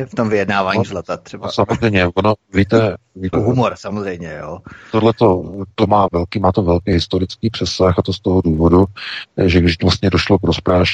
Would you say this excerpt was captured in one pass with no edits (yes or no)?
no